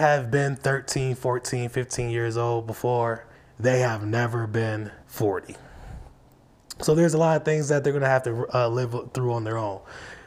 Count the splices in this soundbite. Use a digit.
2